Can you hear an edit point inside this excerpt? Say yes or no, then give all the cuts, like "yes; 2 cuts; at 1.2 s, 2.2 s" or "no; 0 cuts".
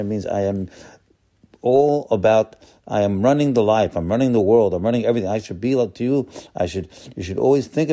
no; 0 cuts